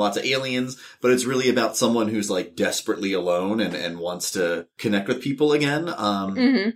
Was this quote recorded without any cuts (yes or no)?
yes